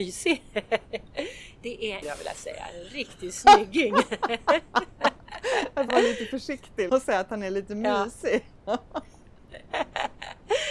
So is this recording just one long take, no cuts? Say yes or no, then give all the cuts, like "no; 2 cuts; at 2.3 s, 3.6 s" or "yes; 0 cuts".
no; 3 cuts; at 2.0 s, 5.9 s, 6.9 s